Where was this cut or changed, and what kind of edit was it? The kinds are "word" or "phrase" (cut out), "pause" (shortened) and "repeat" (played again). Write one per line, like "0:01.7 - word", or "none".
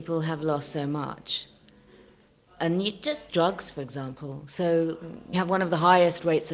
0:03.3 - word
0:05.3 - word